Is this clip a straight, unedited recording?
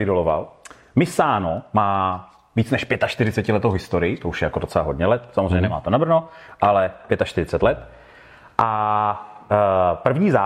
yes; 0 cuts

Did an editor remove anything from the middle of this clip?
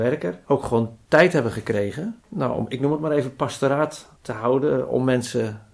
yes; 2 cuts; at 2.2 s, 4.2 s

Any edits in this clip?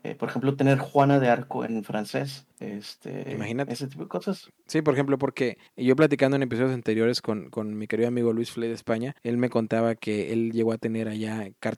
yes; 3 cuts; at 2.5 s, 5.7 s, 9.2 s

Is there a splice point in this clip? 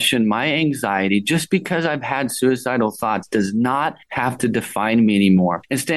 no; 0 cuts

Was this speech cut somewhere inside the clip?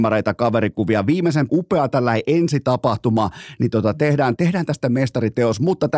yes; 2 cuts; at 1.5 s, 4.4 s

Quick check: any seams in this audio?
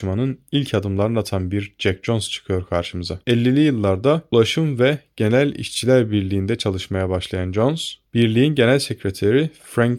no; 0 cuts

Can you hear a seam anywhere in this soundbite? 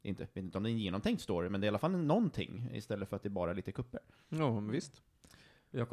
no; 0 cuts

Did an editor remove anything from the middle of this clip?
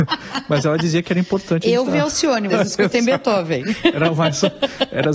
yes; 2 cuts; at 1.9 s, 2.5 s

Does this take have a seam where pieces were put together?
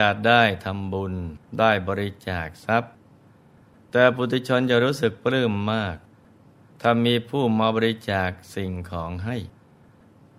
yes; 1 cut; at 1.5 s

